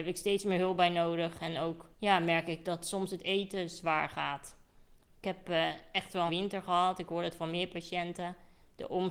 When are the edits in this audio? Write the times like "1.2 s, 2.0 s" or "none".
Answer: 1.9 s, 6.3 s